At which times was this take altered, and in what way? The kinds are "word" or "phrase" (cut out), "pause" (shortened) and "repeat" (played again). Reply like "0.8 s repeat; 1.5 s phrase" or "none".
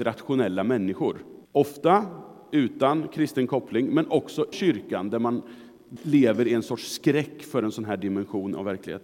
1.4 s pause; 4.5 s word; 6.0 s word